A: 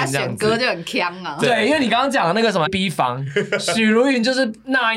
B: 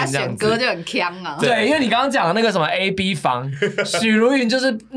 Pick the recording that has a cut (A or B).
A